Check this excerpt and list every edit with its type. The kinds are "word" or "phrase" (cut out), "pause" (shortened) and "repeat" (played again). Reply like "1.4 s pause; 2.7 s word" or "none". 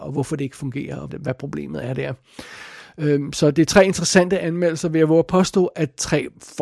1.1 s word

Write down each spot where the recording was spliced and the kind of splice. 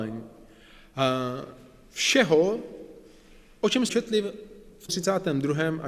3.9 s word; 4.9 s word

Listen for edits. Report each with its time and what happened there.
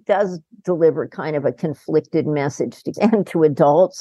2.9 s word

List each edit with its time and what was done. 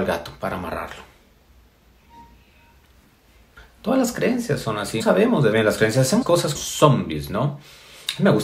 5.0 s word; 5.5 s word; 6.2 s word; 6.5 s word

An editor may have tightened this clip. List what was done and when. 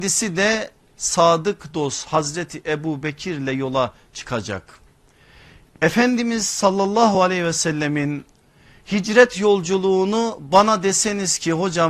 none

